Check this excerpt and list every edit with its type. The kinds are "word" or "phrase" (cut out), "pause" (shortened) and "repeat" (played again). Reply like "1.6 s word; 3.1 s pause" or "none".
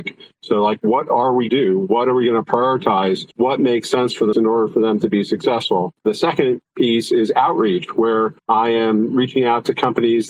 1.5 s phrase; 3.3 s pause; 4.3 s word; 8.4 s pause